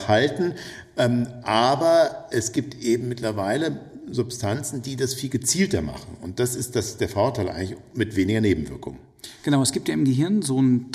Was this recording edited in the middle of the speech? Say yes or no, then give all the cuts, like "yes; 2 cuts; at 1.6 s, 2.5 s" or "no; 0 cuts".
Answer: no; 0 cuts